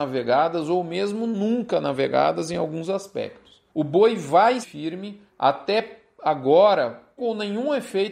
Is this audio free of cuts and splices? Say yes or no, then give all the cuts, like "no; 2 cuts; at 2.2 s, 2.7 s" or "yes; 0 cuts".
no; 4 cuts; at 3.7 s, 4.6 s, 5.3 s, 7.2 s